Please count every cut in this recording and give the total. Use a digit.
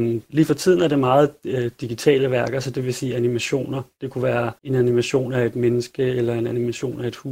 1